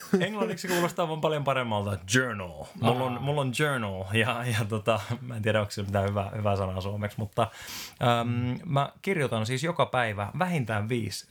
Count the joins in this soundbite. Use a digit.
0